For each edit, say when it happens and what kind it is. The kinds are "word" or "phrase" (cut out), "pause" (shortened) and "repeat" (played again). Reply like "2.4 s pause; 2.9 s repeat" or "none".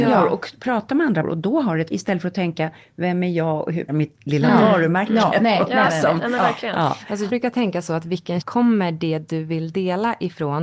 1.2 s word; 1.9 s word; 3.9 s word; 7.3 s word; 8.4 s word